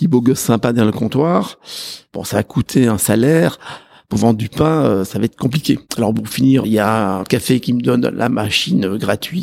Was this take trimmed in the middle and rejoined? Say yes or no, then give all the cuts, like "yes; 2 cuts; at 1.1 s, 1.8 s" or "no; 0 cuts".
yes; 3 cuts; at 5.9 s, 6.6 s, 7.2 s